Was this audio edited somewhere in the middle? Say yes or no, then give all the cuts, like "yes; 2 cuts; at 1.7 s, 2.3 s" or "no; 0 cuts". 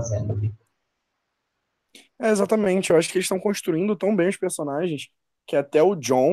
no; 0 cuts